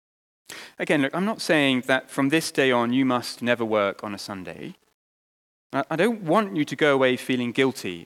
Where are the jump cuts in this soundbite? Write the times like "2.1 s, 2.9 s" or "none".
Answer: none